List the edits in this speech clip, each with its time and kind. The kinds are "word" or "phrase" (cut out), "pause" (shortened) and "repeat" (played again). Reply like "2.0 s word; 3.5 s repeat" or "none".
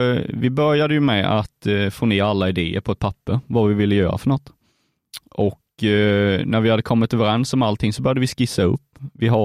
none